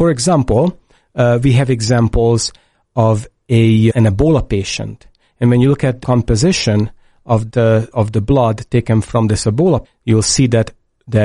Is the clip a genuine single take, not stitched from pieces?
no; 5 cuts; at 3.9 s, 6.0 s, 7.5 s, 7.9 s, 9.8 s

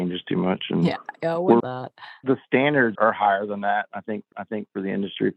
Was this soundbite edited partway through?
yes; 3 cuts; at 1.6 s, 2.9 s, 4.3 s

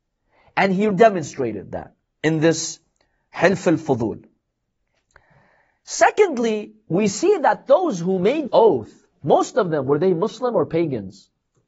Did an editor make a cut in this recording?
yes; 2 cuts; at 0.9 s, 8.5 s

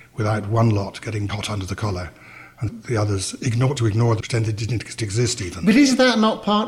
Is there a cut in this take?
yes; 5 cuts; at 1.3 s, 2.7 s, 3.8 s, 4.2 s, 5.0 s

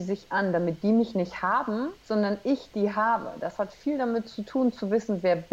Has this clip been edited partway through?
yes; 1 cut; at 2.0 s

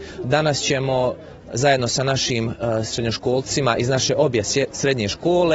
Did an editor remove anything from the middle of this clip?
no; 0 cuts

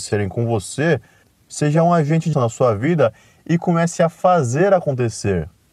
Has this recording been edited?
yes; 1 cut; at 2.3 s

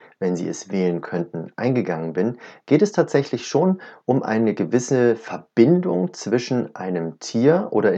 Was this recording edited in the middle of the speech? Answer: no; 0 cuts

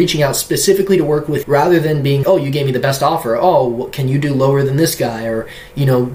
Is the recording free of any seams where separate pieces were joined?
no; 2 cuts; at 1.4 s, 2.2 s

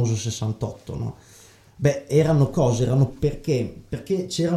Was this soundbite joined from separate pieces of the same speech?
yes; 2 cuts; at 2.5 s, 3.1 s

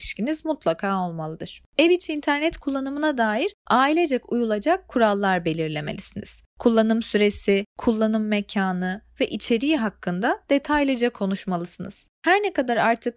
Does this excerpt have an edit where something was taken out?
no; 0 cuts

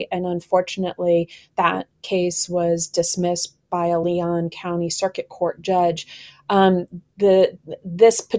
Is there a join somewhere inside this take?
no; 0 cuts

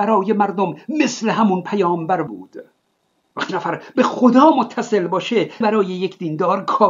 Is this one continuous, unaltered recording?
no; 3 cuts; at 2.3 s, 3.5 s, 5.6 s

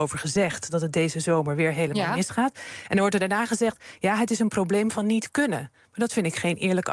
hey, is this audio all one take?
yes; 0 cuts

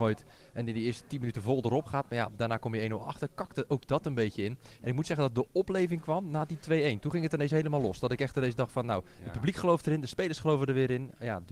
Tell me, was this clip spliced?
no; 0 cuts

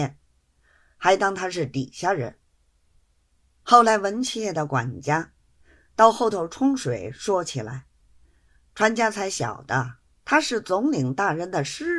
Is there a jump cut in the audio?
no; 0 cuts

